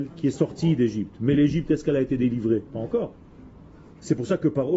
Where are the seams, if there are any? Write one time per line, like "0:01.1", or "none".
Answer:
none